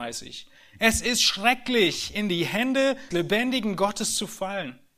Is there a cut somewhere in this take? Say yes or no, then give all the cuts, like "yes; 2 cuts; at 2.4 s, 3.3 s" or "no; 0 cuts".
yes; 1 cut; at 3.1 s